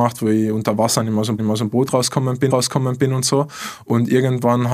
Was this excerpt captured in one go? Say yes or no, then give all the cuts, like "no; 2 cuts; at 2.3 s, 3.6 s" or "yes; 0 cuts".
no; 2 cuts; at 1.4 s, 2.5 s